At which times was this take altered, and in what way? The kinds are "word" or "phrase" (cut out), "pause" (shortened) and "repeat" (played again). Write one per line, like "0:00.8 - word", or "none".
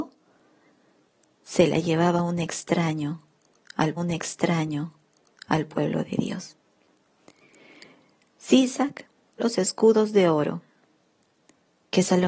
0:04.0 - repeat
0:09.4 - word